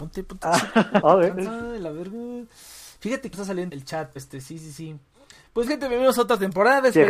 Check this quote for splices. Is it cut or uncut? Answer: cut